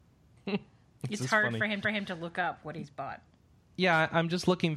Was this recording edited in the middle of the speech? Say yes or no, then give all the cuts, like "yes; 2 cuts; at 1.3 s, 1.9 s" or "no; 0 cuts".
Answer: yes; 1 cut; at 1.8 s